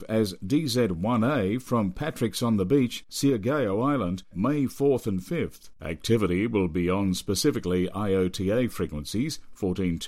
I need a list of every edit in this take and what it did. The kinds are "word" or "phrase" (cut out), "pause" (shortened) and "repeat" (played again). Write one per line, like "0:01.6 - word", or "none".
0:04.3 - word
0:05.8 - pause